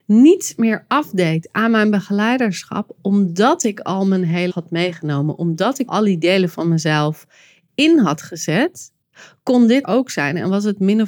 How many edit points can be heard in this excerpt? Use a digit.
3